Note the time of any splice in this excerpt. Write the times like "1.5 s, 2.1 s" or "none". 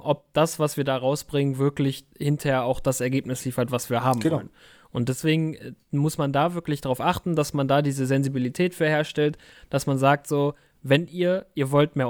none